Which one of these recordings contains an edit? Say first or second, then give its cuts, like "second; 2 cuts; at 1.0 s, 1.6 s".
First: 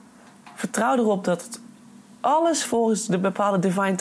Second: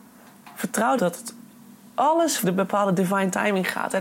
second; 2 cuts; at 1.0 s, 2.4 s